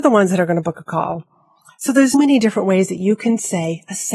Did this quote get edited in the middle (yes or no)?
yes